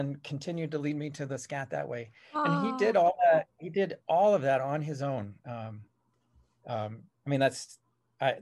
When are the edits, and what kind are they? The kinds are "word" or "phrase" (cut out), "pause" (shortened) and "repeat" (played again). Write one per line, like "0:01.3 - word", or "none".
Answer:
none